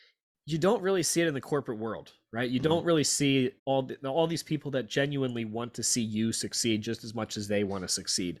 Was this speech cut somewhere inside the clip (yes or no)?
yes